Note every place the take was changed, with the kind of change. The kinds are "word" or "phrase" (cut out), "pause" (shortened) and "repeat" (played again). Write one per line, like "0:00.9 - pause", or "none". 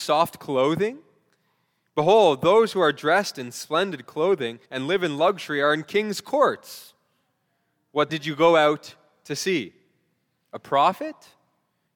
0:04.7 - pause
0:08.1 - word

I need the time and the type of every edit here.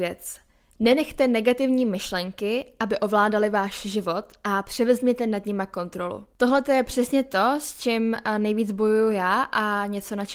none

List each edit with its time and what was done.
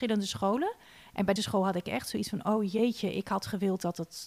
0:01.4 - word

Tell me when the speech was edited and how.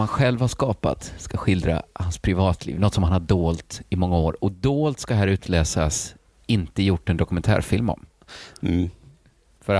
none

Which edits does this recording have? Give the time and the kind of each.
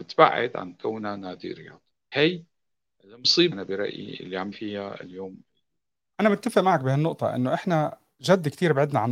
0:02.1 - word
0:03.5 - word
0:04.5 - word
0:05.8 - pause

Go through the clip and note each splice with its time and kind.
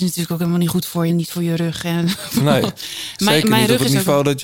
0:01.1 - word

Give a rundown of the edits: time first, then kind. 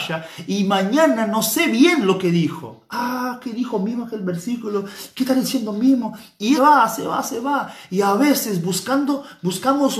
0:06.6 - phrase

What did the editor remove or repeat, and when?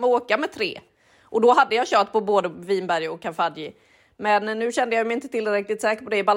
none

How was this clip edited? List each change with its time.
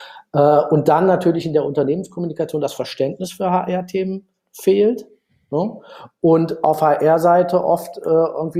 none

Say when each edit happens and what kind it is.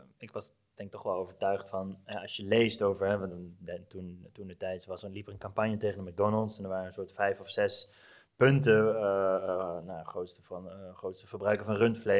none

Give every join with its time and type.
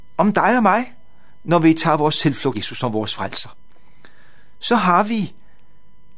0:02.5 - word

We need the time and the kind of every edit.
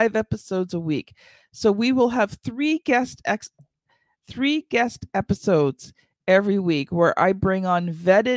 none

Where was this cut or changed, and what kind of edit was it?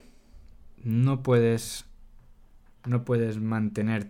0:02.7 - word

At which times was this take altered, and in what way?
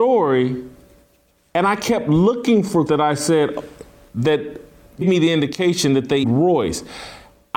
0:02.9 - word
0:05.0 - word
0:06.2 - word

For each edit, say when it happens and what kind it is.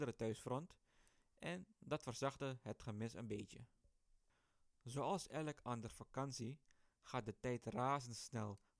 none

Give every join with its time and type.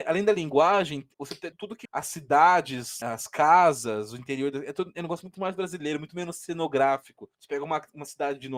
0:01.1 - pause
0:01.5 - word
0:01.8 - word
0:03.0 - word
0:07.3 - pause

